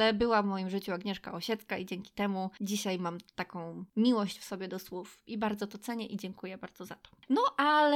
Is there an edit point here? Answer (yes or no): no